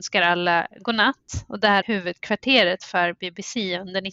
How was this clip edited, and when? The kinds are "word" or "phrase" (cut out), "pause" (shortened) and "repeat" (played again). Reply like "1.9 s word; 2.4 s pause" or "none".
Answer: 1.8 s phrase